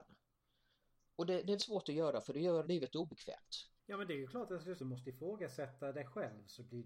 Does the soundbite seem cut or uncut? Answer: cut